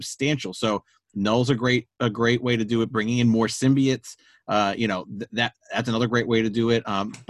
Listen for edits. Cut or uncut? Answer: uncut